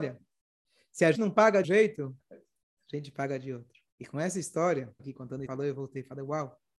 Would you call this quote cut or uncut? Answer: cut